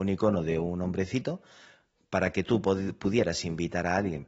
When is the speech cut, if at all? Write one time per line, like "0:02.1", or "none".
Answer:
none